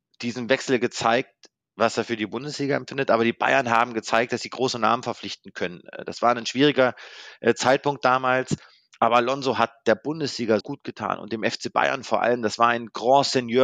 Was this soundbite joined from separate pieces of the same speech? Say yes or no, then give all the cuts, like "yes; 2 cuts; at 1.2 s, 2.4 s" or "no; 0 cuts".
yes; 1 cut; at 10.6 s